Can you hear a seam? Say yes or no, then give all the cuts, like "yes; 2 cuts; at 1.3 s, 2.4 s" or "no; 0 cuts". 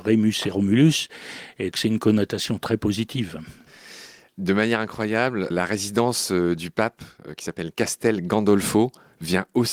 yes; 2 cuts; at 1.7 s, 5.5 s